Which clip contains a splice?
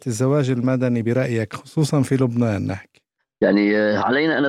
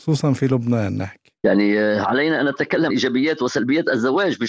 second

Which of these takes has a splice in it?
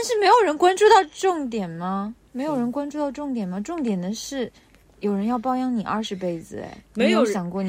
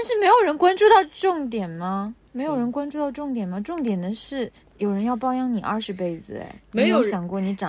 second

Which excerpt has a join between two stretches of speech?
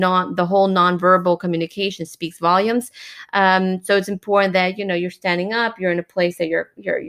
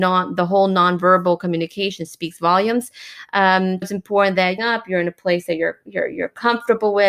second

